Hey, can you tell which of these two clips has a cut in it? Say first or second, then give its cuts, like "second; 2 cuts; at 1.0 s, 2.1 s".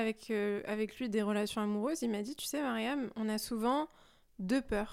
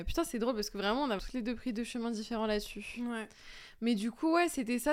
second; 1 cut; at 1.2 s